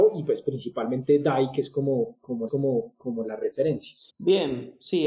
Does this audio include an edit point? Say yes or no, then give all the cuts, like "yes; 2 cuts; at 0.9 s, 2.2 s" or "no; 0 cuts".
yes; 2 cuts; at 2.5 s, 4.1 s